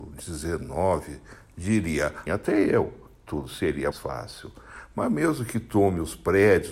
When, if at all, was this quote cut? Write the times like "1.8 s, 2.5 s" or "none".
2.3 s, 3.9 s